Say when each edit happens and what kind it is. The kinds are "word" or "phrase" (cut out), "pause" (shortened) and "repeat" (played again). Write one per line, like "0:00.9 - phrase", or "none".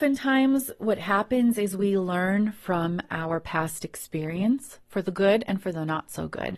none